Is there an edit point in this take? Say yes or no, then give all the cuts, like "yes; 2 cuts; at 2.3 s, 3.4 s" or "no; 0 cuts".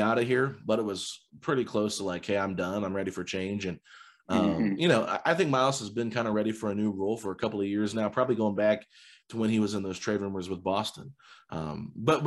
no; 0 cuts